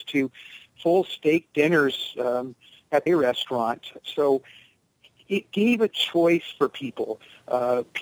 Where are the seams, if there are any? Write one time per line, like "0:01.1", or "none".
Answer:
0:03.1